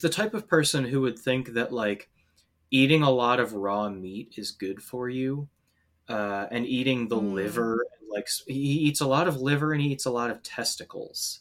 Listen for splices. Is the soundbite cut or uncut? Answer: uncut